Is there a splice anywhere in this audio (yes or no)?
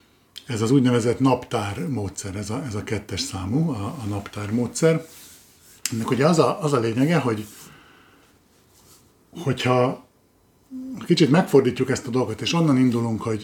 no